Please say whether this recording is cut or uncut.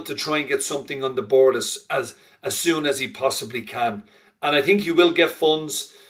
uncut